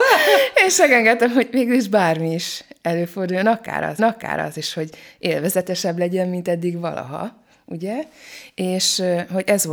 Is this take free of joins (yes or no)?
no